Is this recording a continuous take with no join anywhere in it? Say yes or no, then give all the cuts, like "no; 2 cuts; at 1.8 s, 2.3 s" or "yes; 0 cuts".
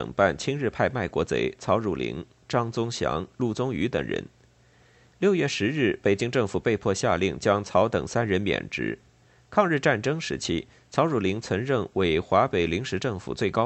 yes; 0 cuts